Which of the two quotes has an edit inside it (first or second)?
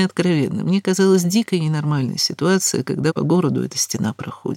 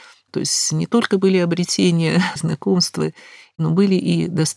second